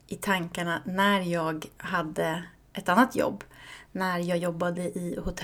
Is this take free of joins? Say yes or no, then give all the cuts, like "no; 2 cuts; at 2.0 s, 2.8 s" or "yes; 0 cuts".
yes; 0 cuts